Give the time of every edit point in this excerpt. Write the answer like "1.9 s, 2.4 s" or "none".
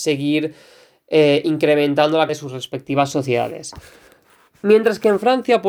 2.3 s